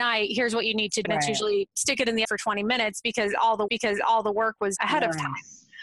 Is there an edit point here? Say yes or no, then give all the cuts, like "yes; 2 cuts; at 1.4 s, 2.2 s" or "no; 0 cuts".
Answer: yes; 4 cuts; at 1.0 s, 2.2 s, 3.7 s, 4.8 s